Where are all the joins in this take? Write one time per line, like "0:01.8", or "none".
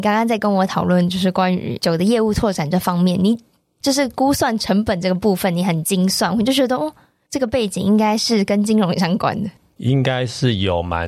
none